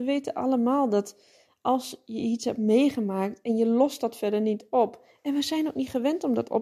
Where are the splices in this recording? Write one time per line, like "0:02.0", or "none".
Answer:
none